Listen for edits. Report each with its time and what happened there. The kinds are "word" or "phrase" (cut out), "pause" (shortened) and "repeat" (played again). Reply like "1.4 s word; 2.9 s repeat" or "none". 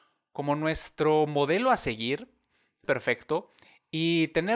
2.8 s phrase